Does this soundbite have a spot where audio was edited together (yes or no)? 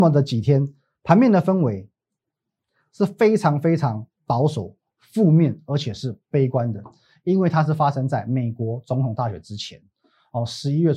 no